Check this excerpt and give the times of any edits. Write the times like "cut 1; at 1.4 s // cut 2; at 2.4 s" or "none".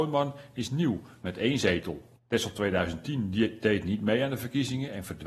cut 1; at 2.1 s